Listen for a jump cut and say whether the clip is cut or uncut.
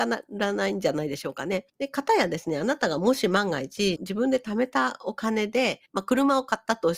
cut